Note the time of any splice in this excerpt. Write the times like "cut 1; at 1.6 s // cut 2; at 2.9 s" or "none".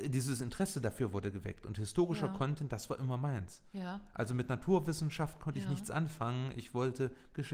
none